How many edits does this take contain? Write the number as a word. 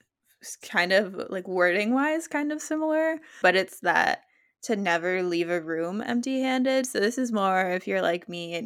one